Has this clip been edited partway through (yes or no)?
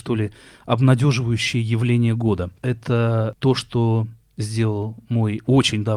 no